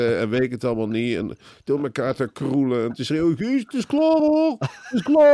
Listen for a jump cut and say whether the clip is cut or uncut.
uncut